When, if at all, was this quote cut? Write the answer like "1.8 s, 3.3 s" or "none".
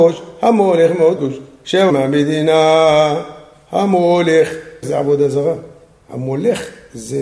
1.2 s, 1.9 s, 4.8 s